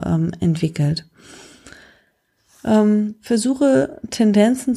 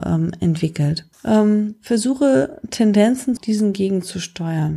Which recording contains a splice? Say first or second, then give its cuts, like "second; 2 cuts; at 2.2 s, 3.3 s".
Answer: second; 2 cuts; at 1.1 s, 3.4 s